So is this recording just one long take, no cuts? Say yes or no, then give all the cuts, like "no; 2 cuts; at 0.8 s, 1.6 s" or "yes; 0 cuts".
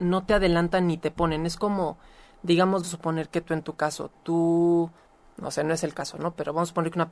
no; 1 cut; at 2.8 s